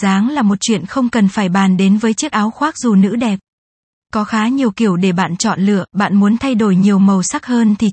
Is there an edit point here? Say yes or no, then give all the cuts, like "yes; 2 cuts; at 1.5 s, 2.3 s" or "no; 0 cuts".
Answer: no; 0 cuts